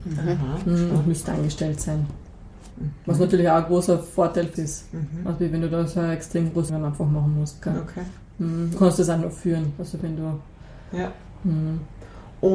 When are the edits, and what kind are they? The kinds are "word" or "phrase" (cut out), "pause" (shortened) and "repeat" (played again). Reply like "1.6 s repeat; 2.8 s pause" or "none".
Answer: 1.2 s word; 4.6 s word; 6.7 s word; 8.8 s word

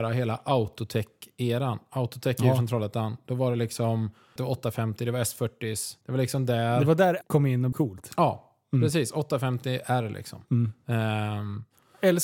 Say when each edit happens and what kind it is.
4.4 s word; 6.0 s pause; 7.2 s word; 7.7 s word

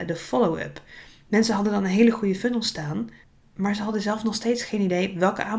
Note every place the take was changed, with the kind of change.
3.2 s pause

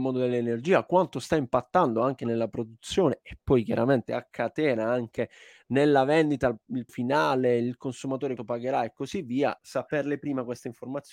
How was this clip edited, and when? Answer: 6.9 s word; 8.4 s word; 9.6 s word

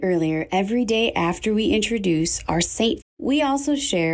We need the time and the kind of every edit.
3.0 s phrase

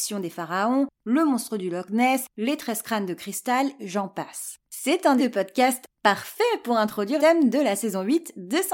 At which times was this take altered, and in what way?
3.8 s word; 4.6 s pause; 5.2 s word; 7.2 s word

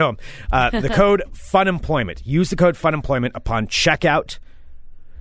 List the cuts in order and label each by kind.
none

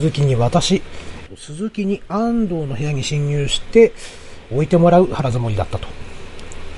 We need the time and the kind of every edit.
4.5 s phrase

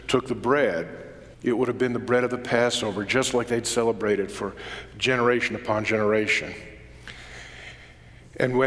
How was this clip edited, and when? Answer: 1.3 s pause

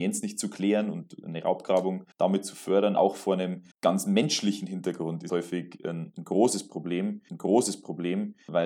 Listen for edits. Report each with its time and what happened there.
2.1 s pause; 3.0 s word; 3.7 s pause; 5.3 s word; 7.3 s repeat

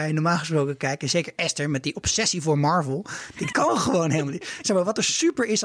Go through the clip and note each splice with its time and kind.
3.5 s word

